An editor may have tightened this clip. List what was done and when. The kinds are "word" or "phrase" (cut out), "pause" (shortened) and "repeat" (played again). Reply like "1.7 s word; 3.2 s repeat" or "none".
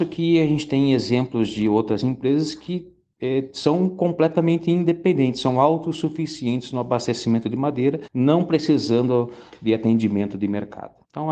none